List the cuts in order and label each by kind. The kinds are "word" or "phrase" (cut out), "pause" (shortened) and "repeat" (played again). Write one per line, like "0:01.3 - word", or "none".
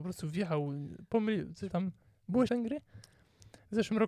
0:01.7 - word
0:02.5 - phrase